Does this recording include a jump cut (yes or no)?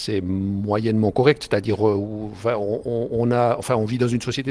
no